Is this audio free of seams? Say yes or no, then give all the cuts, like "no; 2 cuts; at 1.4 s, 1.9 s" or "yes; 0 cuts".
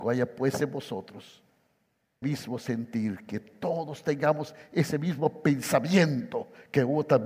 no; 1 cut; at 2.2 s